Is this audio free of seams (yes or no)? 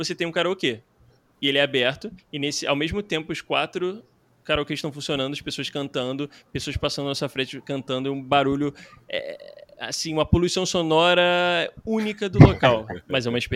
no